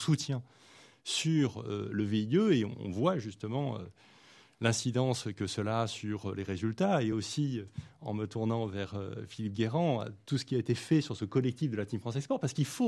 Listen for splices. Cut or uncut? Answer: uncut